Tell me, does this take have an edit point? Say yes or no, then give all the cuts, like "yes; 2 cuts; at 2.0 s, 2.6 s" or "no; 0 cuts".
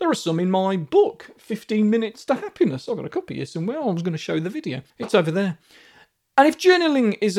yes; 1 cut; at 4.9 s